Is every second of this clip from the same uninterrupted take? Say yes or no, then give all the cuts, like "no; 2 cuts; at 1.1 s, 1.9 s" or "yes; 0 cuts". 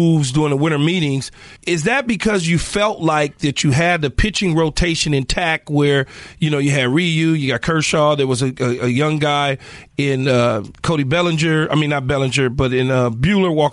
no; 1 cut; at 1.6 s